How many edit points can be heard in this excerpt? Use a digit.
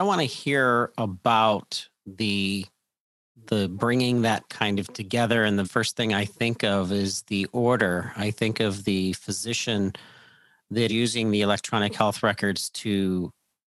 3